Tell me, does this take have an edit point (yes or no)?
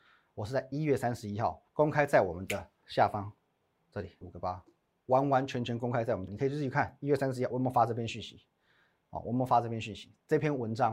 yes